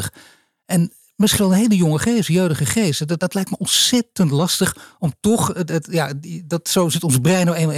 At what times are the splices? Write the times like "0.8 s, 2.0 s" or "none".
1.4 s, 3.2 s